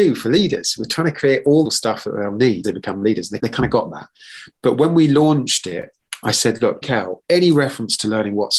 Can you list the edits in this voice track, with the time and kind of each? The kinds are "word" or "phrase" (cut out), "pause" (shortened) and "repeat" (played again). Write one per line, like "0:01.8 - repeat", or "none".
0:01.6 - phrase
0:02.6 - phrase
0:03.4 - word
0:06.2 - word
0:06.8 - word
0:07.2 - pause